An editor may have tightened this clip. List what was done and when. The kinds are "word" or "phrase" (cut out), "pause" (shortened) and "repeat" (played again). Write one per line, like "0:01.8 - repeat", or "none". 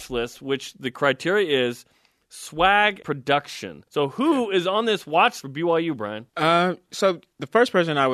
0:03.0 - word
0:03.9 - pause
0:05.4 - word
0:06.3 - pause